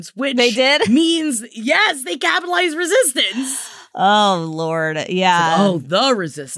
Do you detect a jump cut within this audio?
no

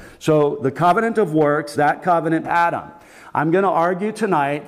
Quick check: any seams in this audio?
yes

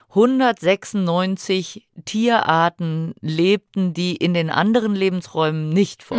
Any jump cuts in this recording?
no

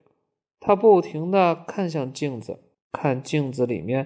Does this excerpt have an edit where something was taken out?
yes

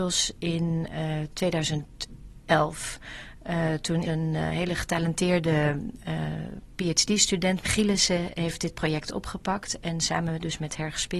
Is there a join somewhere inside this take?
yes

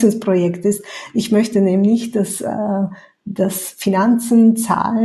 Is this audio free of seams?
yes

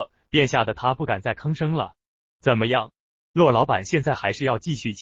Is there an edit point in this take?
no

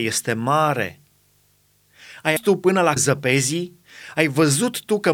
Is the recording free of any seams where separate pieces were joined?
no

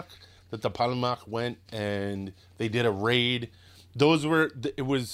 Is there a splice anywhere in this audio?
no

